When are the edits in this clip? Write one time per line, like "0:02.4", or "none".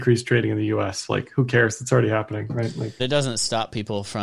0:03.0